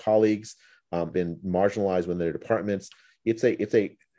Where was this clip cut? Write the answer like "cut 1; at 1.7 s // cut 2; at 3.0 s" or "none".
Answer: cut 1; at 1.1 s